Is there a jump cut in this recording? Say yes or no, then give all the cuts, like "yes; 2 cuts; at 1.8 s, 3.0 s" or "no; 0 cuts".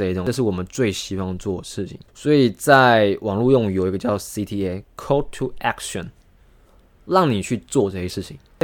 yes; 1 cut; at 2.1 s